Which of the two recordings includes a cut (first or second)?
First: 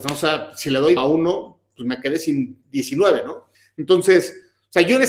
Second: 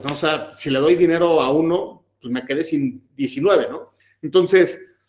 first